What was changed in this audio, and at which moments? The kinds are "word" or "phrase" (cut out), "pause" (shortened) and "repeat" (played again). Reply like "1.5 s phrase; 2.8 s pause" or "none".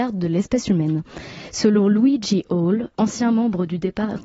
2.9 s pause